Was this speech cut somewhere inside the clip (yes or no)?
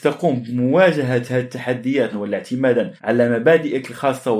yes